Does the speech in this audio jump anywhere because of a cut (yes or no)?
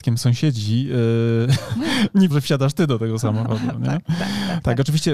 yes